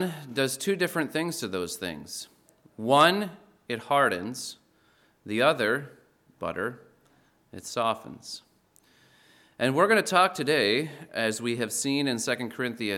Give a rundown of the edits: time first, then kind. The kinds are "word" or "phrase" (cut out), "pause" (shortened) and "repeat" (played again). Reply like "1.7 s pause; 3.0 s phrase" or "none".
none